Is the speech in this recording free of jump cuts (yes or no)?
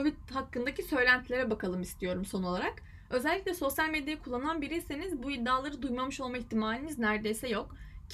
yes